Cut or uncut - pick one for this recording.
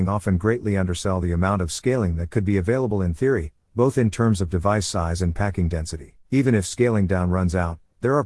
cut